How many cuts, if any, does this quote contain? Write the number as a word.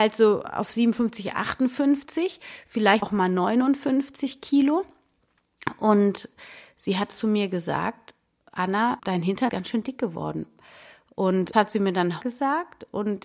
six